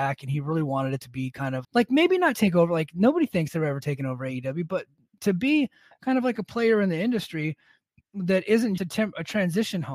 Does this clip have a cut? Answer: yes; 2 cuts; at 1.6 s, 8.8 s

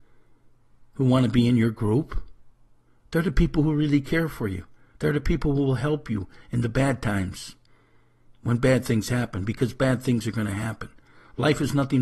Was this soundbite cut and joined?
no; 0 cuts

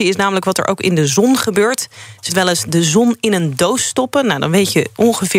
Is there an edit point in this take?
yes; 1 cut; at 2.3 s

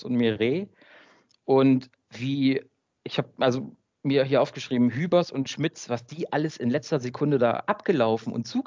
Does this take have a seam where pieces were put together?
no; 0 cuts

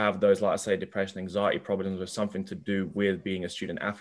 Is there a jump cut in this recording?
no; 0 cuts

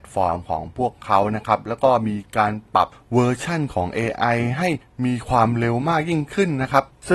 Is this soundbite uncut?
yes; 0 cuts

